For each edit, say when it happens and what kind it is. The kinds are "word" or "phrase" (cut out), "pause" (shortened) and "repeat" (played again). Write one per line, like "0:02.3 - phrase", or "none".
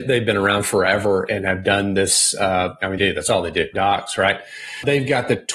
0:01.3 - word
0:03.0 - phrase
0:03.7 - word